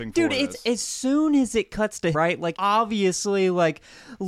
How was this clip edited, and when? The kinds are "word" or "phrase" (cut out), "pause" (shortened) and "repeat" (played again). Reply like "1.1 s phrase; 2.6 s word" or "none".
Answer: 2.1 s word; 2.5 s phrase